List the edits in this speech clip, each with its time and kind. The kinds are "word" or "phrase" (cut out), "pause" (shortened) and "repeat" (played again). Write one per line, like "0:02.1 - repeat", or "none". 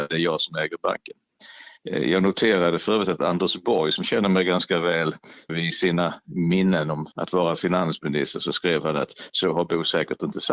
0:05.5 - word
0:07.1 - pause